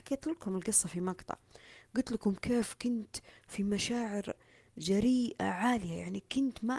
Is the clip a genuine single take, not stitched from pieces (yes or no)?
yes